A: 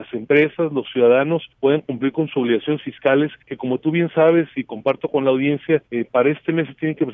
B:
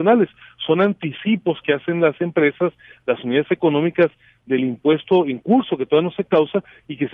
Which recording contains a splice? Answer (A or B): A